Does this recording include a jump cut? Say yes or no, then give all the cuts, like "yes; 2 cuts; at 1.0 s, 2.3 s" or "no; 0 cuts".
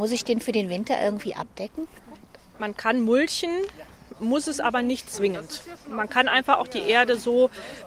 no; 0 cuts